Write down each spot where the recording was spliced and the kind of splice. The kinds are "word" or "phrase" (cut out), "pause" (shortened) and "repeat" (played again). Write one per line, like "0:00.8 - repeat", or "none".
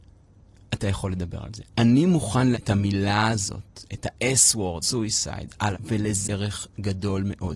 0:02.5 - word
0:04.8 - word
0:05.7 - word
0:06.2 - word